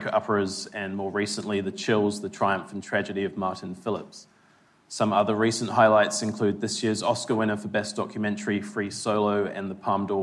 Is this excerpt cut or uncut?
uncut